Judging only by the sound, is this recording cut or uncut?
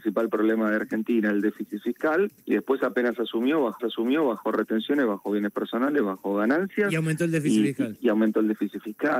cut